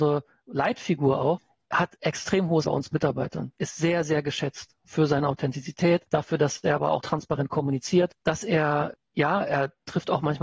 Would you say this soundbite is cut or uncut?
cut